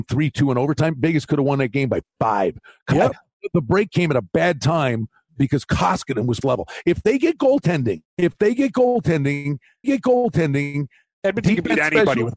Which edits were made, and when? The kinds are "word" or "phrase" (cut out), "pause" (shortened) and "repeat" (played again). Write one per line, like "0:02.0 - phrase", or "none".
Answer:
0:05.3 - word
0:06.4 - phrase
0:08.1 - pause
0:09.8 - repeat